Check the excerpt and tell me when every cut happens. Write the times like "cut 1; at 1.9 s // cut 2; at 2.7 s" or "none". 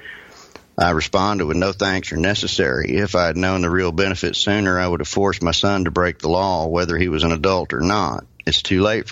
none